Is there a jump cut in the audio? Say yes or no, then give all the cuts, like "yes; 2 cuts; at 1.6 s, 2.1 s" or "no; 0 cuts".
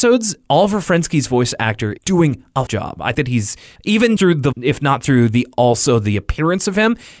yes; 6 cuts; at 2.0 s, 2.7 s, 3.1 s, 3.8 s, 4.2 s, 4.5 s